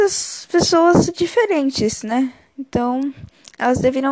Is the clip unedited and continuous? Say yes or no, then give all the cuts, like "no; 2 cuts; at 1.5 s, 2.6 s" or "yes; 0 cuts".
yes; 0 cuts